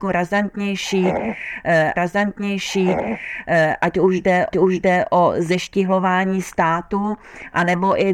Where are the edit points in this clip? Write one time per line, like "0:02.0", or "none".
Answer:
0:01.9
0:04.5